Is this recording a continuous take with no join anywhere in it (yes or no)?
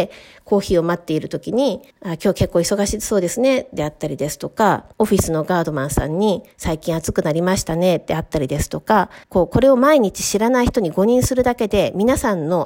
no